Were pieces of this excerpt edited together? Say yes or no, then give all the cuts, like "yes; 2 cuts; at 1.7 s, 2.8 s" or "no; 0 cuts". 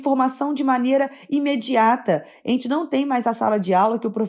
no; 0 cuts